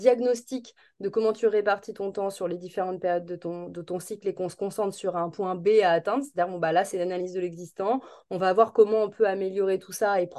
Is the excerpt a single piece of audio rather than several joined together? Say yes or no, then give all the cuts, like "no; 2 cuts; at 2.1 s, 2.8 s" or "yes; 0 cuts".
yes; 0 cuts